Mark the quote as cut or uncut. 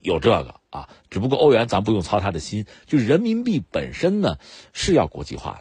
uncut